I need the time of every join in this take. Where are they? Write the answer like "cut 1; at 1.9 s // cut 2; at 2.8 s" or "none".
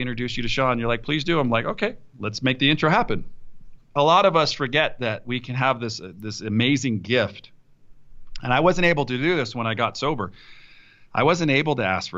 none

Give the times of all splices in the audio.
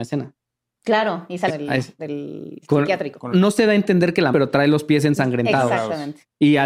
cut 1; at 1.5 s // cut 2; at 2.0 s // cut 3; at 3.3 s // cut 4; at 4.3 s

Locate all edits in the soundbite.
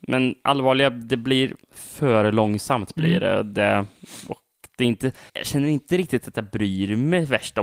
cut 1; at 1.6 s // cut 2; at 5.3 s

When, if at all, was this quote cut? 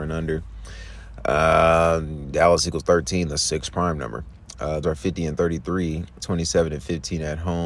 cut 1; at 4.8 s // cut 2; at 6.2 s

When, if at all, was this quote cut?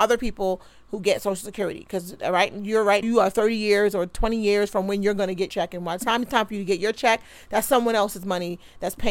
cut 1; at 3.0 s // cut 2; at 5.5 s

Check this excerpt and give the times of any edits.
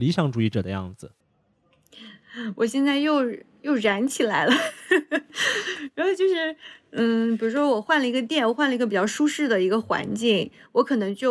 none

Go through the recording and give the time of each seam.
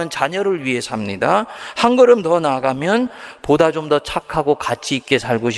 none

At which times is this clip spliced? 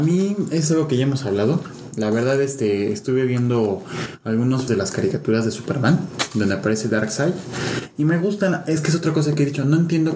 cut 1; at 4.7 s

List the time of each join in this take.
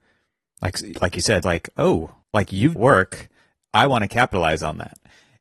cut 1; at 1.4 s // cut 2; at 2.2 s // cut 3; at 2.8 s

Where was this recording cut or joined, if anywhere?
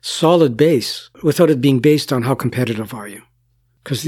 cut 1; at 1.1 s

